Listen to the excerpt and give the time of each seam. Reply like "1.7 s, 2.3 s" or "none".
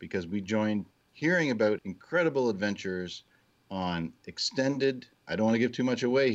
0.9 s, 1.8 s